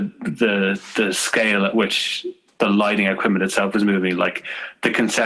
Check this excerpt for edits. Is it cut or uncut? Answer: uncut